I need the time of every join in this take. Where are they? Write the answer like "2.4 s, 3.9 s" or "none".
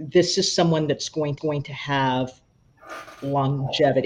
1.4 s